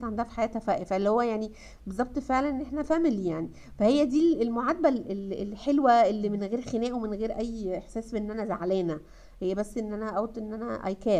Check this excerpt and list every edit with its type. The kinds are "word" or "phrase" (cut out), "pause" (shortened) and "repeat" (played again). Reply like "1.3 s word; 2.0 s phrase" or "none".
none